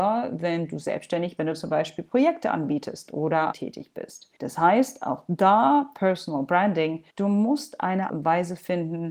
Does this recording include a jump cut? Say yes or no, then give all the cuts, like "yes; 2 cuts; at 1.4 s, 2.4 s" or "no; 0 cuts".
yes; 6 cuts; at 1.4 s, 3.5 s, 4.4 s, 5.9 s, 7.1 s, 8.1 s